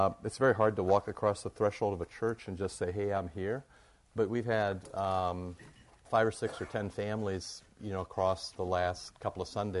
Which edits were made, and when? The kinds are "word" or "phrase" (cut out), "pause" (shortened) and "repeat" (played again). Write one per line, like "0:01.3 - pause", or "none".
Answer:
0:06.0 - phrase